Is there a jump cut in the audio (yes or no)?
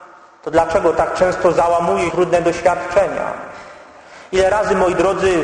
yes